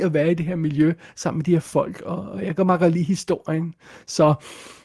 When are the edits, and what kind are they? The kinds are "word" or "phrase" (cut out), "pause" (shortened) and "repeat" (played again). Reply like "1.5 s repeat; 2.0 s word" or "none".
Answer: none